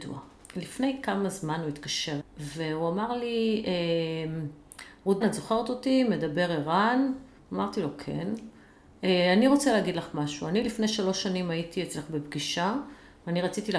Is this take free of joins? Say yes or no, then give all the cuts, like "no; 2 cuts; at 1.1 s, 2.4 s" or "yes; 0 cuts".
no; 3 cuts; at 2.2 s, 5.2 s, 7.4 s